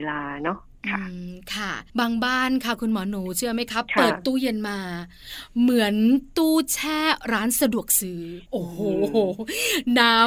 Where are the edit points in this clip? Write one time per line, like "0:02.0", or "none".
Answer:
0:08.4